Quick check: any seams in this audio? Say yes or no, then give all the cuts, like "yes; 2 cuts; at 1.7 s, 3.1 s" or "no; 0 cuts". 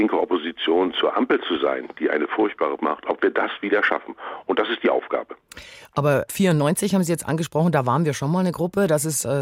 yes; 2 cuts; at 2.8 s, 6.3 s